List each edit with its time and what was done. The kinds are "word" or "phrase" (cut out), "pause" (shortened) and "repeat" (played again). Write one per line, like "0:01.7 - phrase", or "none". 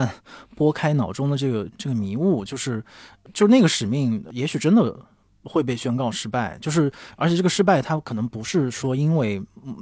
none